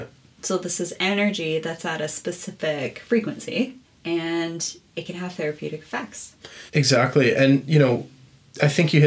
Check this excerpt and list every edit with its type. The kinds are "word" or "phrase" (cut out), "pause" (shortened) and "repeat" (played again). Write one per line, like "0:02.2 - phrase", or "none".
0:03.8 - pause
0:06.7 - pause